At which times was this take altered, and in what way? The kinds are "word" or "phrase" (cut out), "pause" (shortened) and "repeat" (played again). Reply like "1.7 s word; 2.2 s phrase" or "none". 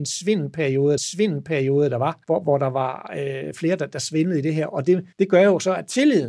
1.0 s repeat; 2.2 s pause; 5.1 s pause